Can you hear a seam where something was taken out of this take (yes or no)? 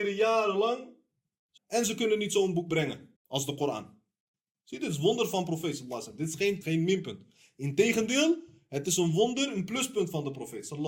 yes